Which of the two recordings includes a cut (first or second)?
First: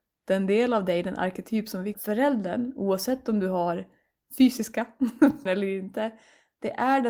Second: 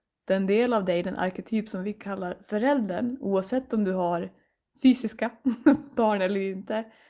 first